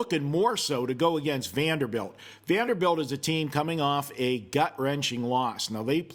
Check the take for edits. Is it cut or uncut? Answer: uncut